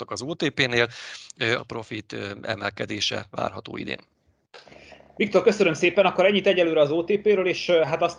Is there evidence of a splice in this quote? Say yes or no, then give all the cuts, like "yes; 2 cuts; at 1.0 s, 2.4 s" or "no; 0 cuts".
yes; 1 cut; at 1.6 s